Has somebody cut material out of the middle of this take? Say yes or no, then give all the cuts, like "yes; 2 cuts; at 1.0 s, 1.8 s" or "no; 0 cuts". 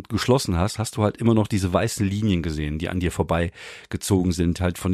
no; 0 cuts